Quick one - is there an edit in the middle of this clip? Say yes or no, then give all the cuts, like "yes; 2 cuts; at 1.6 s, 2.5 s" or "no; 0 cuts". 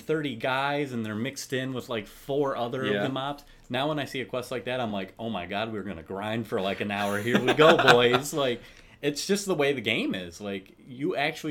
no; 0 cuts